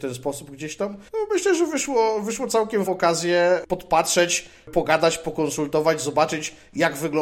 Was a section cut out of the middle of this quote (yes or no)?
yes